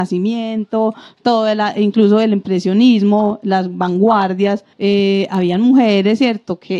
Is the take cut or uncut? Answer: cut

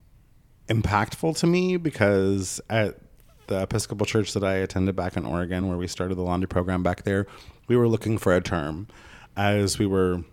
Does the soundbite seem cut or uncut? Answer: uncut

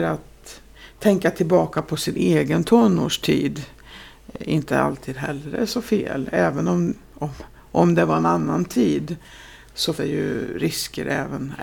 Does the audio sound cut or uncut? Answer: cut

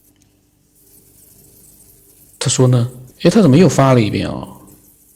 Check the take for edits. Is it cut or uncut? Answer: cut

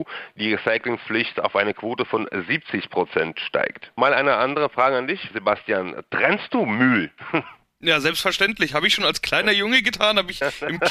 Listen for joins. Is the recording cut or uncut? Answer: uncut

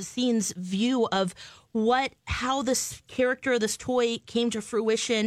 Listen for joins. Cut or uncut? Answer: uncut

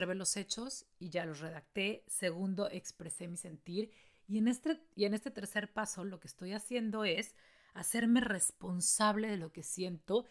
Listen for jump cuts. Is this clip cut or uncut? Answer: uncut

